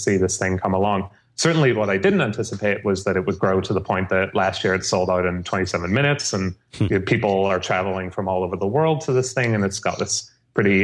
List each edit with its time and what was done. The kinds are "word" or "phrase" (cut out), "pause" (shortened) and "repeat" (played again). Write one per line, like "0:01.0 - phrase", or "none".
none